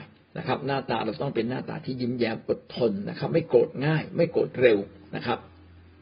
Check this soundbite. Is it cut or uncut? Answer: uncut